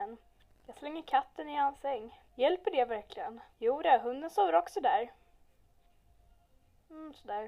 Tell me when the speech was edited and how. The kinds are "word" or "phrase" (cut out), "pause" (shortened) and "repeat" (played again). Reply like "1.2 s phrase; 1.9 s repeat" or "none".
2.3 s pause; 3.5 s pause